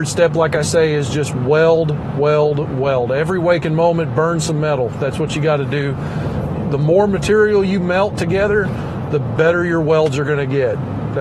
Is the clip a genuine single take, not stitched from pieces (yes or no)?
yes